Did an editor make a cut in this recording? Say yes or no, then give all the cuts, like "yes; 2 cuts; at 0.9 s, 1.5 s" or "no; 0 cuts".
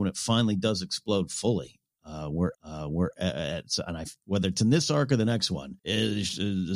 yes; 3 cuts; at 2.5 s, 4.2 s, 5.8 s